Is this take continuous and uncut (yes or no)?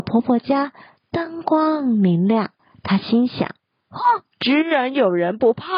no